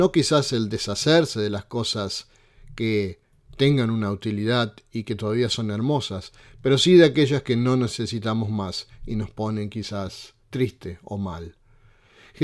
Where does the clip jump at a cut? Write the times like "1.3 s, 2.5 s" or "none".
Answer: none